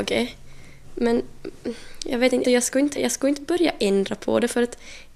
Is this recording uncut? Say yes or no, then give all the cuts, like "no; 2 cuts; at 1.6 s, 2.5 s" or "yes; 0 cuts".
no; 2 cuts; at 2.4 s, 3.0 s